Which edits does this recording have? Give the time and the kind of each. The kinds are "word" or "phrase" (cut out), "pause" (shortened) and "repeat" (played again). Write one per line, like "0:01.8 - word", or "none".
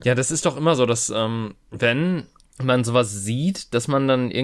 0:02.4 - pause

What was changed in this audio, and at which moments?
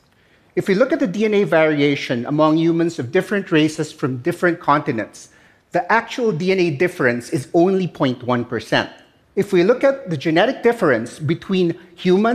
0:09.2 - pause

